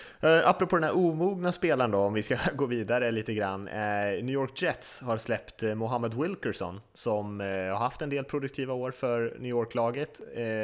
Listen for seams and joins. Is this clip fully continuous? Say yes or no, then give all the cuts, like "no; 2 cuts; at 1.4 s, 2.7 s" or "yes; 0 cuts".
yes; 0 cuts